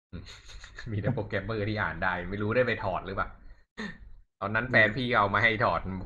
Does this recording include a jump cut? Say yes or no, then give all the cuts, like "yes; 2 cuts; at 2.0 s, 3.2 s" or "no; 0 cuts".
yes; 1 cut; at 4.3 s